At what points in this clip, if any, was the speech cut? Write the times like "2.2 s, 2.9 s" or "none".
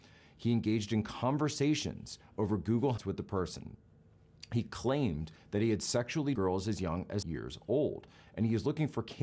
3.0 s, 6.4 s, 7.2 s